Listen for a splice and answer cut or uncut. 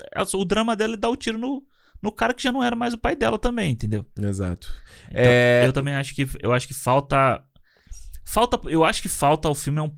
uncut